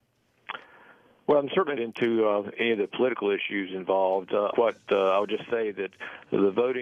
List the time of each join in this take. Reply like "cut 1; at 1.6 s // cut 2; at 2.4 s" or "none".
cut 1; at 1.8 s // cut 2; at 4.5 s